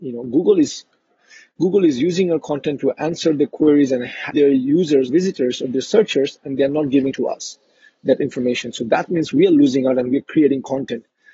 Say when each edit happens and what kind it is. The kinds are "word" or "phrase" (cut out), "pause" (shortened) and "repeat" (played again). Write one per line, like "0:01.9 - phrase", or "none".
0:04.3 - word
0:05.1 - word
0:07.1 - word